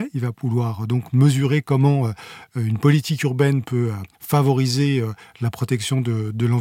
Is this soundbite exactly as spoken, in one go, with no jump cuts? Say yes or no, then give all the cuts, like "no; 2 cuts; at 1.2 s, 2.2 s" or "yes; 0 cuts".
no; 1 cut; at 4.1 s